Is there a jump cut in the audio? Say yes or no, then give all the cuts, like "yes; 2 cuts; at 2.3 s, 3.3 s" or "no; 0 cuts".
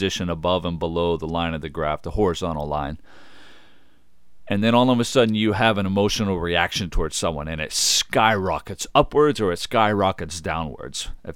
no; 0 cuts